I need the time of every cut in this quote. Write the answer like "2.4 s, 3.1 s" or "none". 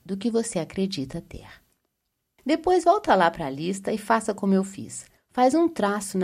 none